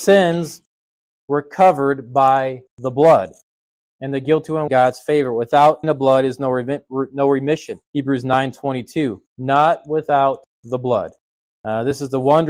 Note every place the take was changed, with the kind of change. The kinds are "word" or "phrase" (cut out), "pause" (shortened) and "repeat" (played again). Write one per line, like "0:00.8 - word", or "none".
0:02.7 - pause
0:04.7 - phrase
0:05.8 - word
0:07.8 - pause
0:09.3 - pause
0:10.5 - pause